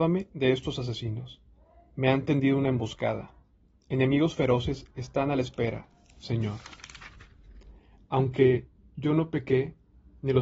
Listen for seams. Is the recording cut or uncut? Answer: uncut